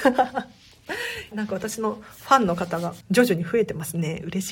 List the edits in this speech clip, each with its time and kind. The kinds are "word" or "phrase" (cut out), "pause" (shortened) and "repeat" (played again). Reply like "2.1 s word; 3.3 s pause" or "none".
1.3 s phrase; 3.0 s pause